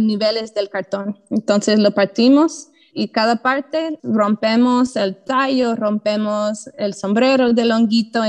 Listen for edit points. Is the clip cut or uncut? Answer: cut